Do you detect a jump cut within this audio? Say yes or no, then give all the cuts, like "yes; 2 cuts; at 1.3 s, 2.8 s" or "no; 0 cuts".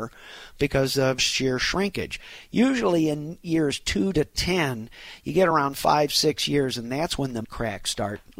yes; 2 cuts; at 1.2 s, 7.4 s